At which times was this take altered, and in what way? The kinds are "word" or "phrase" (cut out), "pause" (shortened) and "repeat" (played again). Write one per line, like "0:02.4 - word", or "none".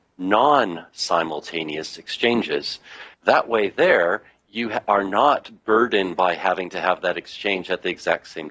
0:03.1 - pause